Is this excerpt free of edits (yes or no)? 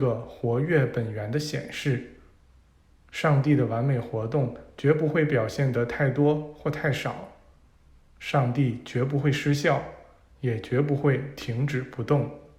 yes